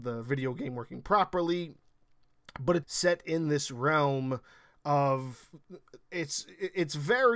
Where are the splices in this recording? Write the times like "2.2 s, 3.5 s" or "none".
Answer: 2.8 s